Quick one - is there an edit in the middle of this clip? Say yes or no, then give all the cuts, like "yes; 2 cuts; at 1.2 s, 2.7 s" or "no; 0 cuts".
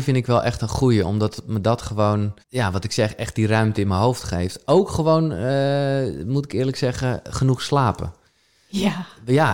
yes; 1 cut; at 2.4 s